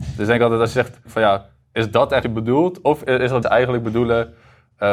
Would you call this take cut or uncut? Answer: cut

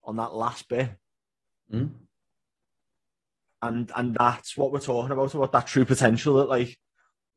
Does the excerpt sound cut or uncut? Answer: uncut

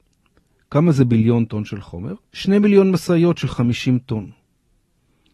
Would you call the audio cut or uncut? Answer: cut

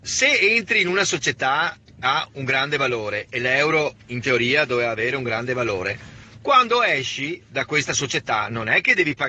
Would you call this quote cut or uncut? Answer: cut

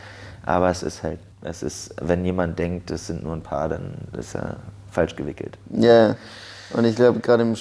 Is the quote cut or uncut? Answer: cut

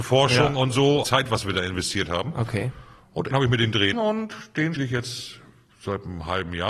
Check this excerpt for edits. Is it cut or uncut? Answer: cut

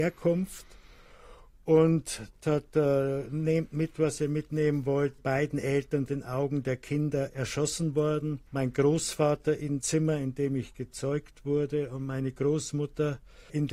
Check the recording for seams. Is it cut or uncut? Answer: cut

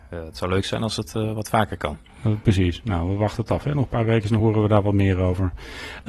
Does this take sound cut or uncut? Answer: uncut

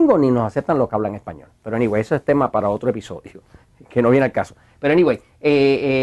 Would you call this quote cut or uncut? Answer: uncut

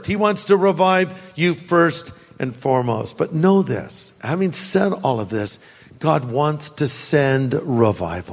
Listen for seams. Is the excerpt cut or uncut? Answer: uncut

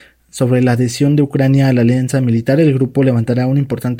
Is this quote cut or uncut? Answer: uncut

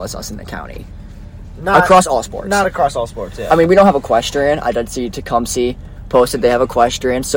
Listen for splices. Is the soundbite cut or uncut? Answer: uncut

